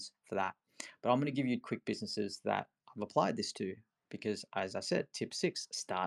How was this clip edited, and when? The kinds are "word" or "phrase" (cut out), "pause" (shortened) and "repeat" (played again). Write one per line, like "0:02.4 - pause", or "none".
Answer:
0:01.6 - word